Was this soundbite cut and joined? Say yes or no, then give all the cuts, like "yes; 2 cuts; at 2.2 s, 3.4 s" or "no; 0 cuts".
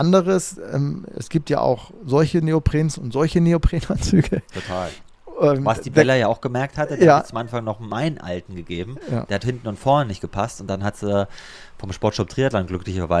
no; 0 cuts